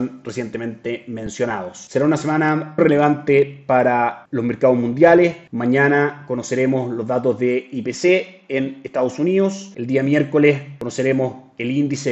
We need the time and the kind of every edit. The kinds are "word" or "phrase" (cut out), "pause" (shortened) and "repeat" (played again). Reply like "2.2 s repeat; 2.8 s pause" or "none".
2.8 s word